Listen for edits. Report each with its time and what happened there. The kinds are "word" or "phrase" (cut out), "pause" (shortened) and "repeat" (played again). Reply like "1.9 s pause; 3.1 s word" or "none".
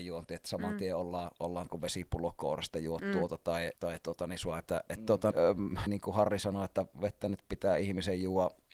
1.7 s word; 3.7 s pause; 4.7 s phrase; 5.3 s word; 5.9 s phrase